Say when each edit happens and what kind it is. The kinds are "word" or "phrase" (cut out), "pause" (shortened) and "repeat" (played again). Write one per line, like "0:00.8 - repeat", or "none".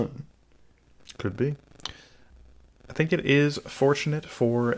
none